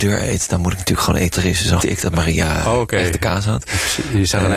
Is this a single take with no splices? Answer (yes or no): no